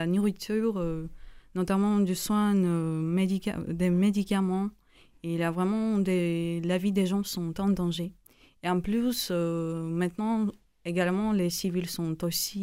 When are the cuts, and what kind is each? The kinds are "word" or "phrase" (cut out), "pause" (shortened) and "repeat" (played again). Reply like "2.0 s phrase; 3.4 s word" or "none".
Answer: none